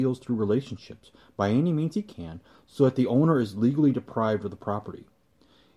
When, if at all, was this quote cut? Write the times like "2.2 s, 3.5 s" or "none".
none

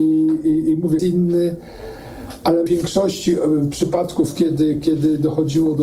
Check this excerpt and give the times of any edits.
1.0 s, 2.7 s

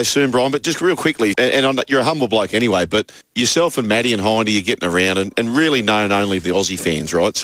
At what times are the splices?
1.3 s, 3.2 s, 6.4 s

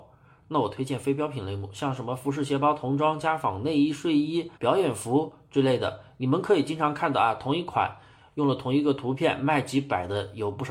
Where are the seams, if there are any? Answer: 4.6 s

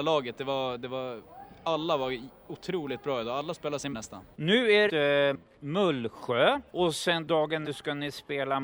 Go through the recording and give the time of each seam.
3.9 s, 4.3 s, 4.9 s, 6.7 s, 7.6 s

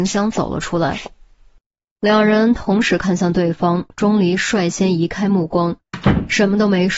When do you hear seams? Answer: 3.9 s

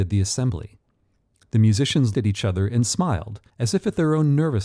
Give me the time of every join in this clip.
2.1 s, 3.5 s

